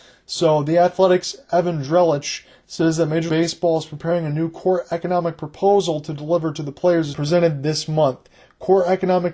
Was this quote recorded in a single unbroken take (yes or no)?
no